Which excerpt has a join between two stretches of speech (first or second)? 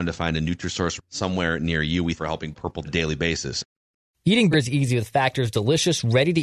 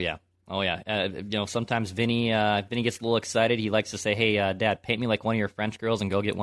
first